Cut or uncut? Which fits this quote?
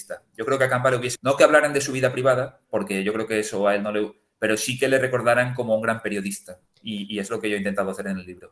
cut